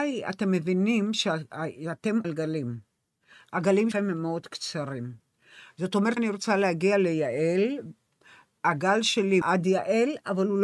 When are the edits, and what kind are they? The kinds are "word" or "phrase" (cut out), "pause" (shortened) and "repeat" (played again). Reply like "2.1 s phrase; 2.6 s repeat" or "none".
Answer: 2.2 s word; 3.9 s word; 6.2 s word; 9.4 s word